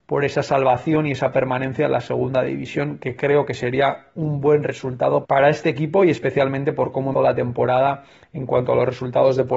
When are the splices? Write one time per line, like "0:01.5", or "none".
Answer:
0:05.2
0:07.1